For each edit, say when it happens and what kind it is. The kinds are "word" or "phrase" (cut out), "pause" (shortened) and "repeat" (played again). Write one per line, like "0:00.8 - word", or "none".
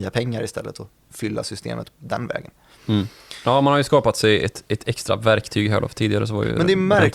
none